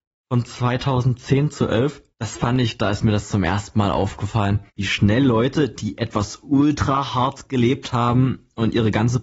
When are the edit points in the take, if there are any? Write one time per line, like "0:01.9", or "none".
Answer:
0:02.1
0:04.7